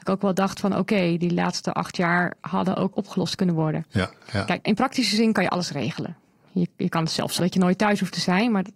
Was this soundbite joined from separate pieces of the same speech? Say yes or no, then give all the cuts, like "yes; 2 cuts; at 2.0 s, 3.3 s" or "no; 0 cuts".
yes; 3 cuts; at 2.9 s, 4.6 s, 7.4 s